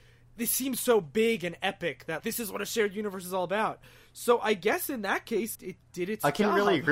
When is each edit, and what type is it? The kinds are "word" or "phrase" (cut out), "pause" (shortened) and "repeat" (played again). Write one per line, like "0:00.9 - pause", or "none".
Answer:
0:02.2 - word
0:05.5 - word